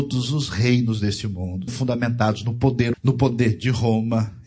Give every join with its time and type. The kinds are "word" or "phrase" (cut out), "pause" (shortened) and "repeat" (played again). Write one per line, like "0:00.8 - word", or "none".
0:01.7 - word
0:02.9 - word